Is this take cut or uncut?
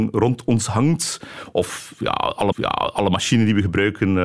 cut